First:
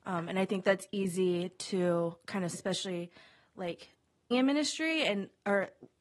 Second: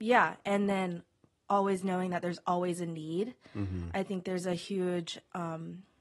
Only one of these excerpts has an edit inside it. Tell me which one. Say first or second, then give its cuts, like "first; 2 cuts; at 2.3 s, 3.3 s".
first; 2 cuts; at 2.5 s, 4.3 s